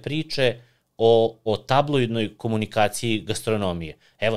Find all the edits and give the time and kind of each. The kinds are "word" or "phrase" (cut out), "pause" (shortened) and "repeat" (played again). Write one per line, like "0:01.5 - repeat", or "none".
0:01.5 - word